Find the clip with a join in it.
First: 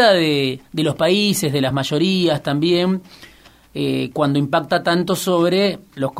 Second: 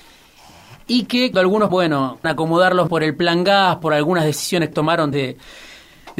second; 6 cuts; at 1.3 s, 1.7 s, 2.2 s, 2.9 s, 4.7 s, 5.1 s

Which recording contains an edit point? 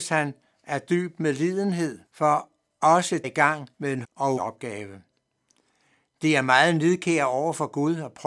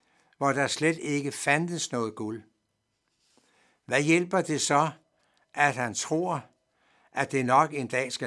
first; 5 cuts; at 2.1 s, 3.2 s, 3.7 s, 4.0 s, 4.4 s

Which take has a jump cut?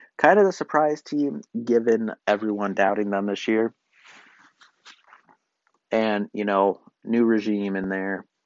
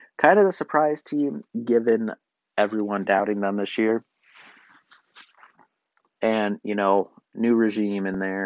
first; 1 cut; at 2.2 s

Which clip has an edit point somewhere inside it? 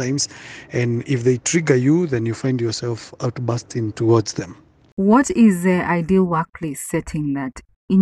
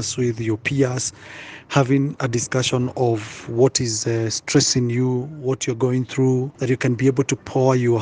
second; 1 cut; at 6.5 s

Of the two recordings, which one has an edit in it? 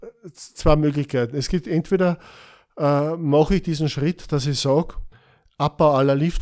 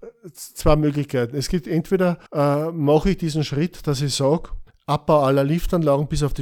second; 2 cuts; at 2.3 s, 4.7 s

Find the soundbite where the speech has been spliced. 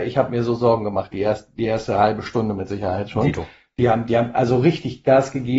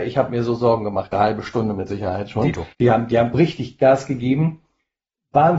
second; 3 cuts; at 1.1 s, 2.7 s, 3.3 s

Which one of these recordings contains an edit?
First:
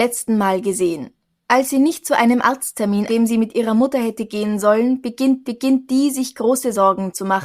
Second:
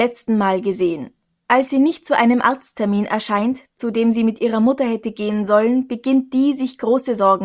first; 2 cuts; at 3.1 s, 5.4 s

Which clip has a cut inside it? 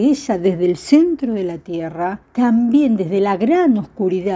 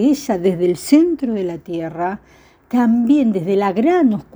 first; 1 cut; at 2.2 s

